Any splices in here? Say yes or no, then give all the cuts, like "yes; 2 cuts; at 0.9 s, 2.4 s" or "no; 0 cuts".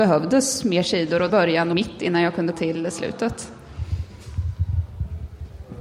yes; 3 cuts; at 1.3 s, 1.7 s, 2.5 s